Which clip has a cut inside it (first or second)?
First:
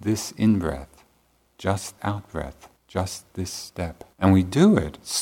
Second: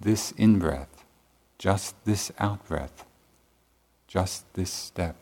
first